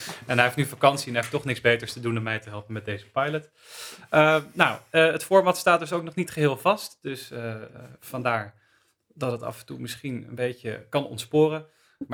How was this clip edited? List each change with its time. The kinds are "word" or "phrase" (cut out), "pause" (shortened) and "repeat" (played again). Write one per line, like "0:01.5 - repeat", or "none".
none